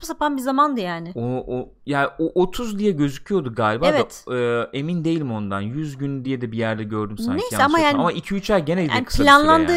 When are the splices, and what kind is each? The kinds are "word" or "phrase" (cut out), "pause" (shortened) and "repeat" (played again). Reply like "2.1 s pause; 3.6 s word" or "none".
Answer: none